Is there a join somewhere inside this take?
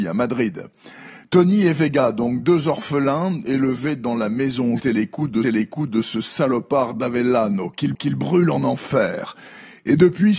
yes; 3 cuts; at 4.8 s, 5.4 s, 7.9 s

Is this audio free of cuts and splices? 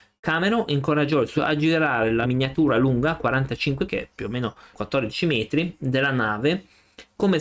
no; 4 cuts; at 1.4 s, 2.2 s, 3.9 s, 4.7 s

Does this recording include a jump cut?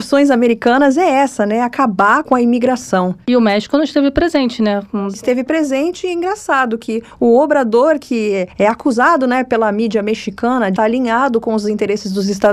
yes; 1 cut; at 10.8 s

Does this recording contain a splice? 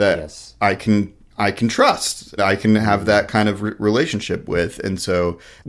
yes; 1 cut; at 2.4 s

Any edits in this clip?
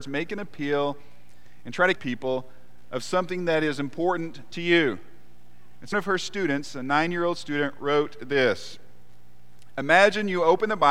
yes; 2 cuts; at 2.0 s, 5.9 s

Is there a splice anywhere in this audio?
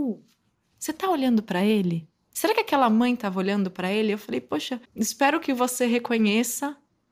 yes; 1 cut; at 4.8 s

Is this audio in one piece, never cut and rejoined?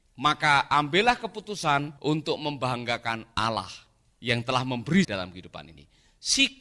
no; 2 cuts; at 2.0 s, 5.0 s

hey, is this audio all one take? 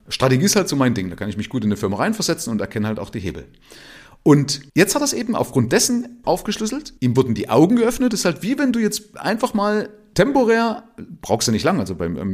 no; 3 cuts; at 4.7 s, 6.2 s, 7.0 s

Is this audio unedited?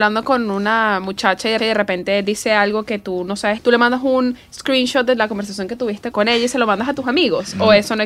no; 3 cuts; at 1.6 s, 3.6 s, 6.1 s

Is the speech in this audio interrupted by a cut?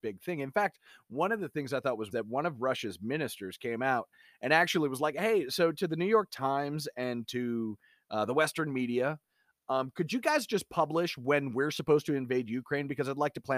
yes; 1 cut; at 2.1 s

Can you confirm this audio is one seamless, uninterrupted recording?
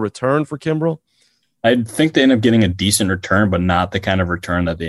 yes; 0 cuts

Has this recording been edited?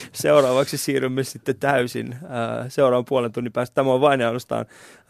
no; 0 cuts

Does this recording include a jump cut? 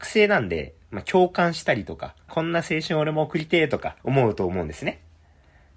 yes; 2 cuts; at 2.3 s, 4.0 s

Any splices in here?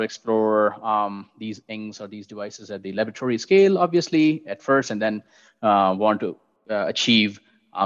no; 0 cuts

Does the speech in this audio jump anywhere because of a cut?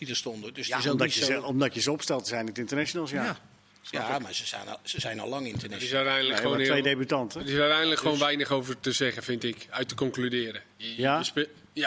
no; 0 cuts

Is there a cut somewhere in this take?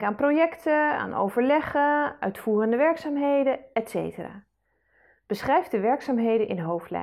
no; 0 cuts

